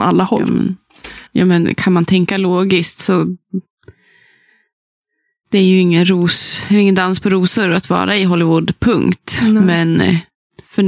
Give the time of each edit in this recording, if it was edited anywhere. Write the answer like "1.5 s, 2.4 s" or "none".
1.3 s